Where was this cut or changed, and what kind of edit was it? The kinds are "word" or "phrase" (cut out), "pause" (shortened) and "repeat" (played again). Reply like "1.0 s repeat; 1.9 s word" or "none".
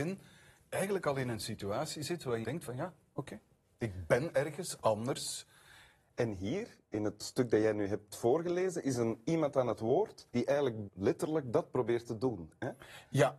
2.4 s word; 10.3 s pause; 10.9 s word